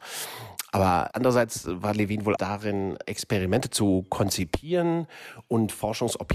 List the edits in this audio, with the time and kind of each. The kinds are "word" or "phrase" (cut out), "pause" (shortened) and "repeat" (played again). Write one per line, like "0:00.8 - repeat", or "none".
0:02.4 - phrase